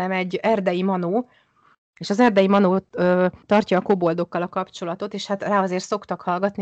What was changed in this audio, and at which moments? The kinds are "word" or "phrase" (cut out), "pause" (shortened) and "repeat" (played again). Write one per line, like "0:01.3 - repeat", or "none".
0:03.4 - pause